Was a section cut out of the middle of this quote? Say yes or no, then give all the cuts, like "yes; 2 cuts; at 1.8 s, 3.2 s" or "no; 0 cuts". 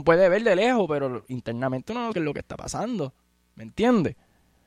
yes; 1 cut; at 2.1 s